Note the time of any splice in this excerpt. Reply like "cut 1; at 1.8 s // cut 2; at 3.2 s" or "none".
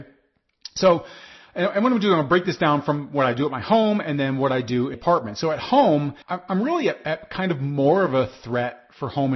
cut 1; at 4.9 s // cut 2; at 6.2 s